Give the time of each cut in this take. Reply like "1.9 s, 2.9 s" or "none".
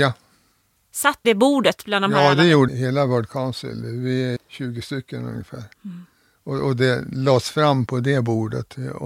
1.2 s, 2.7 s, 4.4 s, 5.7 s, 7.9 s